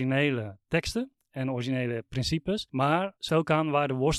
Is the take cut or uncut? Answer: cut